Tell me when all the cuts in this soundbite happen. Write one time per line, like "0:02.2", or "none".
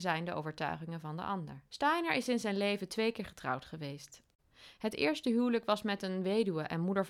0:01.7